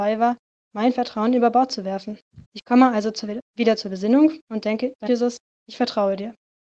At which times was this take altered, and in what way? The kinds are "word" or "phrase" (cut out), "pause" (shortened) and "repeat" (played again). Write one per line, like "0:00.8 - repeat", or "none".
0:02.4 - pause
0:04.4 - pause
0:05.1 - phrase